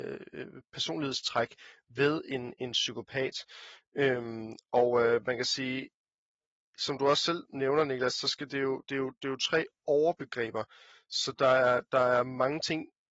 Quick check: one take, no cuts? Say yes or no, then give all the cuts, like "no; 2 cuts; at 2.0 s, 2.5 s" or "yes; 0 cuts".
yes; 0 cuts